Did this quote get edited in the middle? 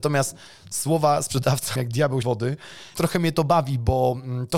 yes; 3 cuts; at 1.8 s, 2.2 s, 2.9 s

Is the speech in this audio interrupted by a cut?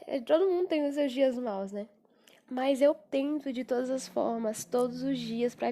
no; 0 cuts

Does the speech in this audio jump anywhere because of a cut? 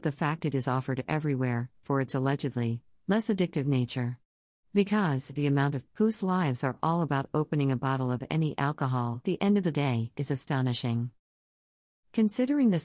yes; 3 cuts; at 1.8 s, 5.9 s, 9.2 s

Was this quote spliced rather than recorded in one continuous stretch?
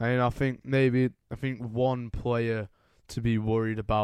no; 0 cuts

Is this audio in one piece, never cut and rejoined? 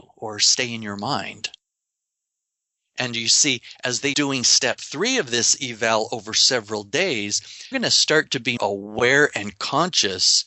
no; 3 cuts; at 4.1 s, 7.7 s, 8.6 s

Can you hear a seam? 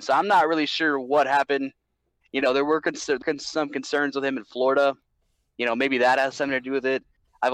yes; 1 cut; at 3.2 s

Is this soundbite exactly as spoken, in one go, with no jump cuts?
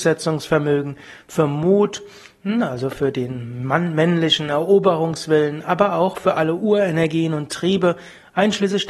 yes; 0 cuts

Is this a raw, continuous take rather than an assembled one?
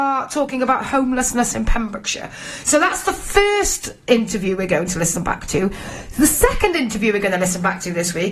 yes; 0 cuts

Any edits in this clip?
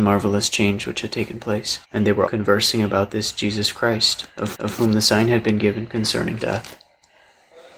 yes; 4 cuts; at 1.8 s, 2.3 s, 4.5 s, 6.4 s

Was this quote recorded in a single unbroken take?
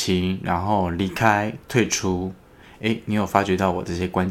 yes; 0 cuts

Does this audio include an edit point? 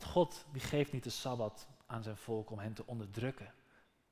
no; 0 cuts

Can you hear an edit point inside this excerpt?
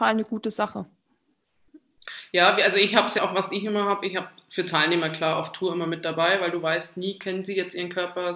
yes; 1 cut; at 3.2 s

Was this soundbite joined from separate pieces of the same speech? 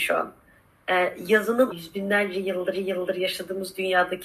yes; 2 cuts; at 1.7 s, 2.7 s

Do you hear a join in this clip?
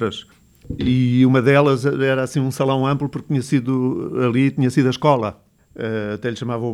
no; 0 cuts

